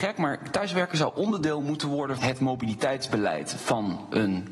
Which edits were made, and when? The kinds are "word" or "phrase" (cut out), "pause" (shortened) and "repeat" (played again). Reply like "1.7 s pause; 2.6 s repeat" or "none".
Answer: 2.2 s word